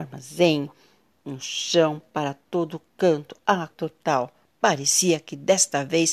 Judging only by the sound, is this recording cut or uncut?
cut